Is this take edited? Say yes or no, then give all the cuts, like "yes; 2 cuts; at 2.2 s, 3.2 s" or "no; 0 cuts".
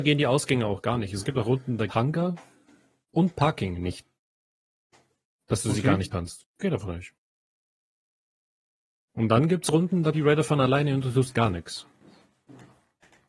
yes; 3 cuts; at 1.9 s, 6.1 s, 10.1 s